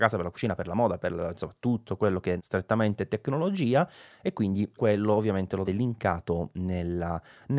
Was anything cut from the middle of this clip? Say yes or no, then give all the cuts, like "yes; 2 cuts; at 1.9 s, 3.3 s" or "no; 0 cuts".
yes; 3 cuts; at 2.4 s, 4.8 s, 5.6 s